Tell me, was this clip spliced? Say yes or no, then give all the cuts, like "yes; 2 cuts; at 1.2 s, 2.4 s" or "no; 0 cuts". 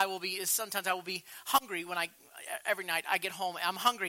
no; 0 cuts